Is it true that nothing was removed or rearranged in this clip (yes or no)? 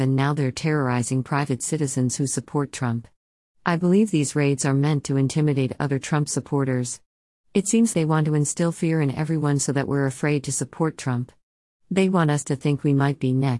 no